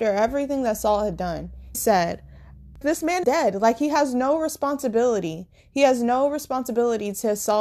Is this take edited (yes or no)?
yes